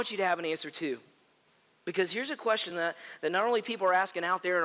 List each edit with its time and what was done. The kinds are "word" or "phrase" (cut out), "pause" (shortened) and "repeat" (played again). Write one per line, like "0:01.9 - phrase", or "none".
none